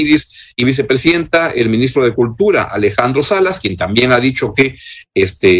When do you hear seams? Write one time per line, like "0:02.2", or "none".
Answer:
none